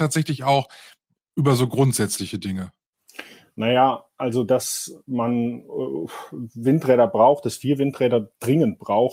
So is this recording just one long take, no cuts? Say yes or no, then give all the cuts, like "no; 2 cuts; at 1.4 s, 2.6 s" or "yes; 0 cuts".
yes; 0 cuts